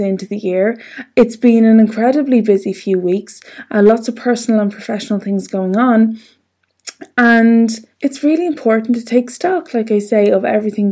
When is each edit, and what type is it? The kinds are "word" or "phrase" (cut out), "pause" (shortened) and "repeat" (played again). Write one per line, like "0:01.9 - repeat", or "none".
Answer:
0:07.9 - pause